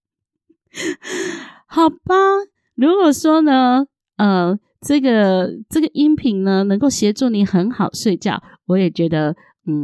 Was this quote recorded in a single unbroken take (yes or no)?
yes